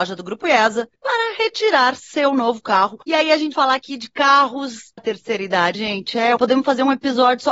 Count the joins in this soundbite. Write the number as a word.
six